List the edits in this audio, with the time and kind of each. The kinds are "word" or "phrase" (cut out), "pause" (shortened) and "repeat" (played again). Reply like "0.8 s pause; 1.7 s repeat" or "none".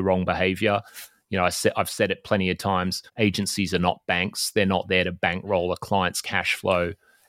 3.1 s pause